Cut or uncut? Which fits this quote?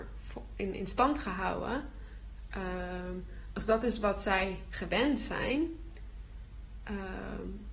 uncut